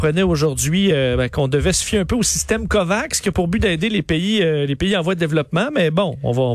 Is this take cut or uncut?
uncut